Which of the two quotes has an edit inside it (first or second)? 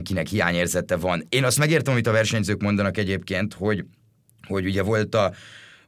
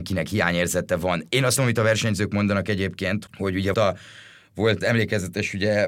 second